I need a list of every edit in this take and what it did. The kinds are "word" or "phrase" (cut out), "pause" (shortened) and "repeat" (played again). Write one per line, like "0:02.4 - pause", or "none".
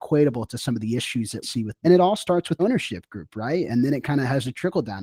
0:01.4 - word
0:01.8 - phrase
0:02.6 - word